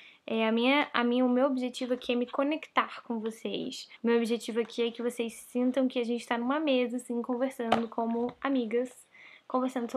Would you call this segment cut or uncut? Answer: cut